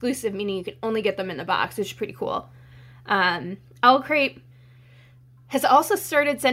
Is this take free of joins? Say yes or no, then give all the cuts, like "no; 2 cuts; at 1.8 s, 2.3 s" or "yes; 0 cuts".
yes; 0 cuts